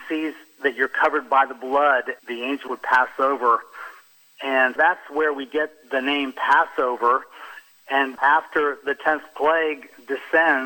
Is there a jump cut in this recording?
yes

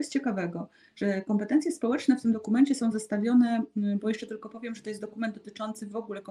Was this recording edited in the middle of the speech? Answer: no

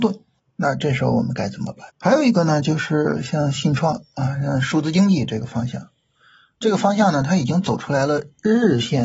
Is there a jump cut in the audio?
yes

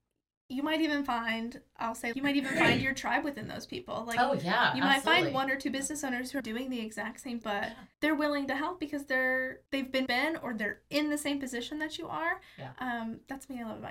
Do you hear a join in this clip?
yes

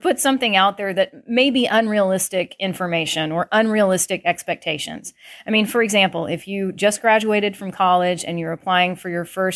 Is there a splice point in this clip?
no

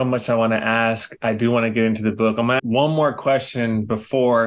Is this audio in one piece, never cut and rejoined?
no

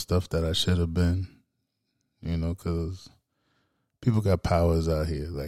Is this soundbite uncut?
yes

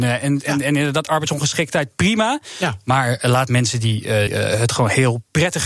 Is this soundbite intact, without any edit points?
no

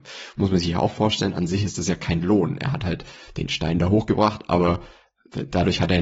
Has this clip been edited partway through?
no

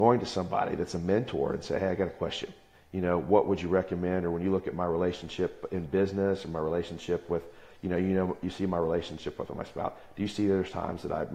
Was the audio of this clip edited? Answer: yes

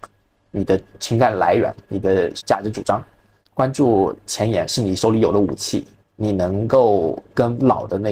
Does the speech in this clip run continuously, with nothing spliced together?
no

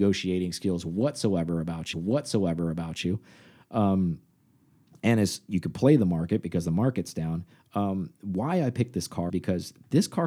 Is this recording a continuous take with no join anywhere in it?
no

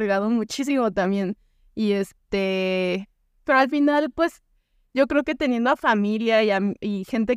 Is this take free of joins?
yes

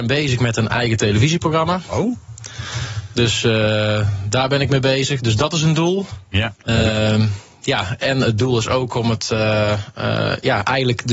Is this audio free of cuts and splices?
no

